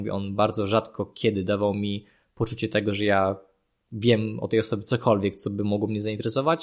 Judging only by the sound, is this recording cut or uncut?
uncut